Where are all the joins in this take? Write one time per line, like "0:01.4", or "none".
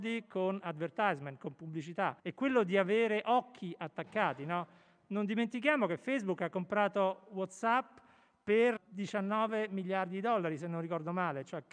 0:02.2
0:08.8